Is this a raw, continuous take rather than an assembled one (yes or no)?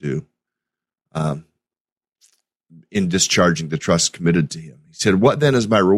yes